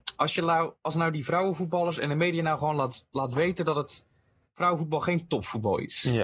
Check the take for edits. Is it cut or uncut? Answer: uncut